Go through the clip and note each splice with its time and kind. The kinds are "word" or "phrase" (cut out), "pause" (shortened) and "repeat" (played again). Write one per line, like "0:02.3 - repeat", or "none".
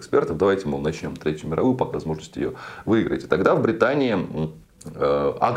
0:01.9 - word